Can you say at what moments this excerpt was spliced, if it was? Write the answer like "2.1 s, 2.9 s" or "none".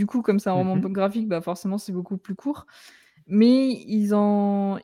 none